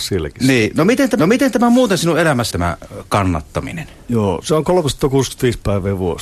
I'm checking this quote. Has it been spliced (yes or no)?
yes